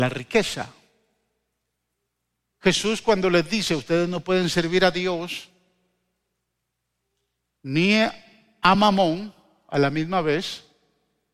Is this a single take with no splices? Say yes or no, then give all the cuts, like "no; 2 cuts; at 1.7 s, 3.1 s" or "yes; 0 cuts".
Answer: yes; 0 cuts